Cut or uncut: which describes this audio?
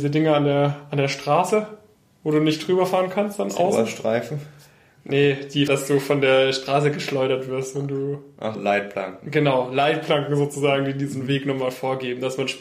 cut